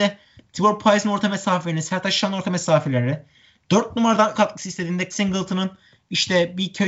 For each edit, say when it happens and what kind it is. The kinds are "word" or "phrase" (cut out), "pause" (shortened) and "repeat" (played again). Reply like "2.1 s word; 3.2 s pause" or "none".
4.3 s word; 5.1 s word